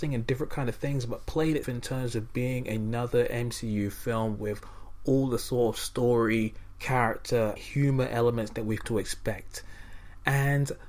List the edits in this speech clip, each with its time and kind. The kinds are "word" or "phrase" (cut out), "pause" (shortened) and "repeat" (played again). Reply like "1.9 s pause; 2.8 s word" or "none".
1.6 s word; 7.6 s word; 8.8 s word